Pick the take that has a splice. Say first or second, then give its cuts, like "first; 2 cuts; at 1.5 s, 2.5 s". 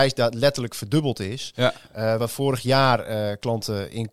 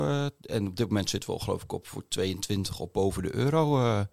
first; 1 cut; at 2.2 s